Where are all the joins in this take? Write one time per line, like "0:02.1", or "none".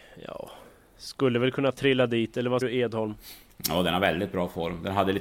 0:02.6